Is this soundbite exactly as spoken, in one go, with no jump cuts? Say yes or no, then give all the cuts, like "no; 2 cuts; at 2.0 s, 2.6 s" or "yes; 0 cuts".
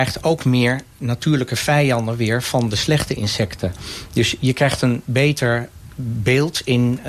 yes; 0 cuts